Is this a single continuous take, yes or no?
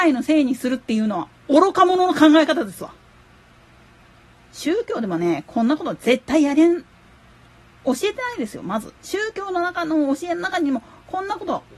no